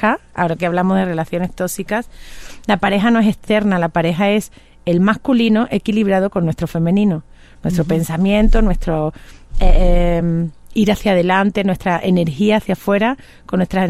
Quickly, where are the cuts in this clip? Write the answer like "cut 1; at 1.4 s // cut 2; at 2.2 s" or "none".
none

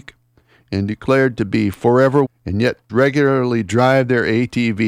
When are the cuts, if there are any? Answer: cut 1; at 2.2 s // cut 2; at 2.9 s

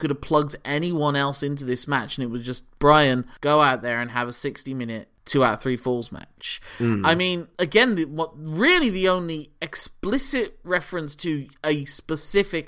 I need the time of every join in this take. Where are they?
none

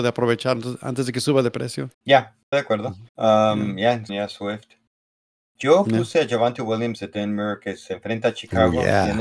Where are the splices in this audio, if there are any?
cut 1; at 1.9 s // cut 2; at 2.5 s // cut 3; at 3.1 s // cut 4; at 4.1 s

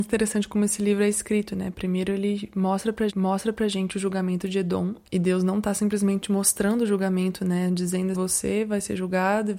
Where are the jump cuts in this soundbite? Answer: cut 1; at 3.1 s // cut 2; at 5.1 s // cut 3; at 8.1 s

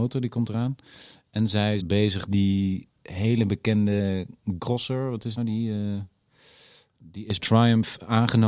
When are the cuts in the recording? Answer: cut 1; at 1.8 s // cut 2; at 2.3 s // cut 3; at 4.6 s // cut 4; at 5.4 s // cut 5; at 7.4 s

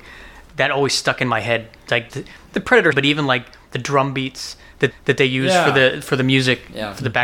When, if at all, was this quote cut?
cut 1; at 2.1 s // cut 2; at 2.5 s // cut 3; at 2.9 s // cut 4; at 4.9 s

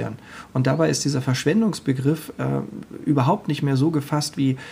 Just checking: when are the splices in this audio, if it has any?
none

